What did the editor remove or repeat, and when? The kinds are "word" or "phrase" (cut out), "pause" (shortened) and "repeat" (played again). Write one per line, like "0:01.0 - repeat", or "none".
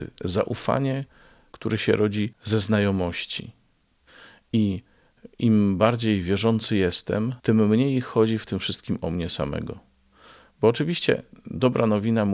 0:07.4 - pause